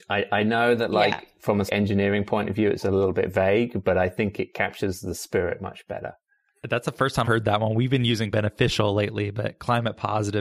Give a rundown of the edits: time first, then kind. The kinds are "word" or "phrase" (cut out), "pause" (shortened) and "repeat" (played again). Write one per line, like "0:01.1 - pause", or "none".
0:01.7 - word
0:07.2 - word
0:08.3 - word